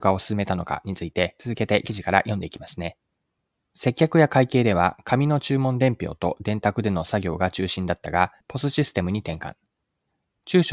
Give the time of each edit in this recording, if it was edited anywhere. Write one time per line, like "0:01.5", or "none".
0:03.1
0:08.4

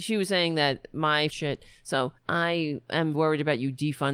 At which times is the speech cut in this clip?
0:01.3
0:02.2
0:03.1

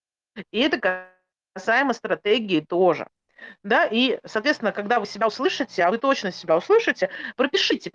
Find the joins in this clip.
none

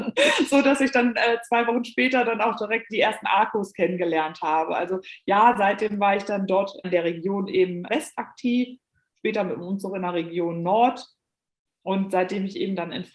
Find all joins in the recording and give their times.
0:02.9
0:06.8
0:07.9

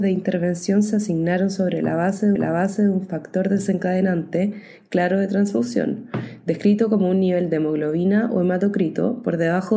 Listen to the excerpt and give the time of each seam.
0:02.4

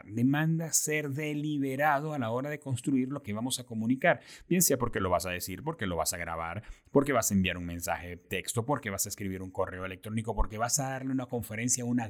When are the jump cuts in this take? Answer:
0:08.2

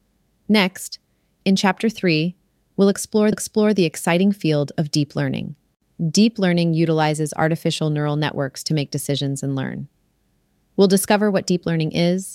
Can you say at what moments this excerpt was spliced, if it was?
0:03.3

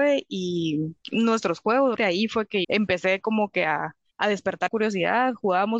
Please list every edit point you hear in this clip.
0:01.0
0:02.0
0:02.6
0:04.1
0:04.7

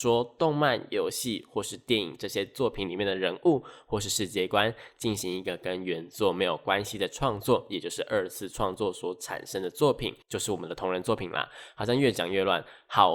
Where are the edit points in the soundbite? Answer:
0:10.2

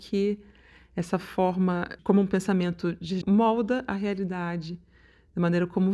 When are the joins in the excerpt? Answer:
0:02.0
0:03.2

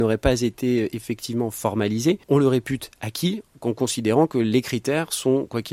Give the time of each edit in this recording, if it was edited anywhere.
0:02.2

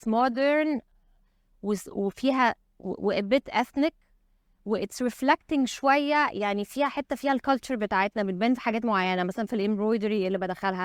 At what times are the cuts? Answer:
0:06.7

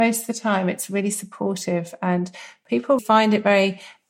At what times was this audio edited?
0:03.0

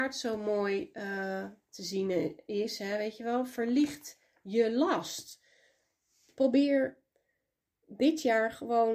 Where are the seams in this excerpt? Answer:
none

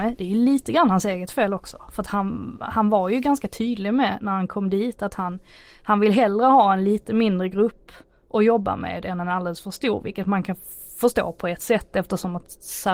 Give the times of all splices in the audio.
none

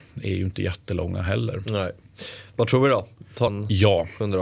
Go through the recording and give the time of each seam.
0:03.5

